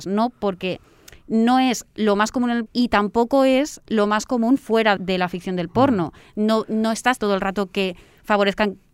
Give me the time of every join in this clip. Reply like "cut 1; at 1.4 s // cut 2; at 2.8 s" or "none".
cut 1; at 2.7 s // cut 2; at 5.0 s // cut 3; at 7.2 s